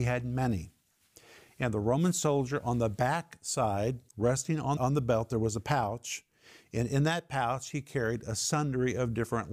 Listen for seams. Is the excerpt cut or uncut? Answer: cut